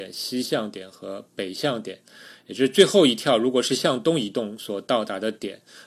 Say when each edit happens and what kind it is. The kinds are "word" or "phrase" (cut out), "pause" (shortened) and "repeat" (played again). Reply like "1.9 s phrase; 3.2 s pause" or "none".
none